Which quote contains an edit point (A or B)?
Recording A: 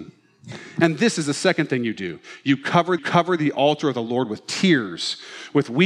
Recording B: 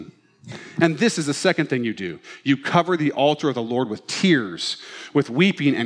A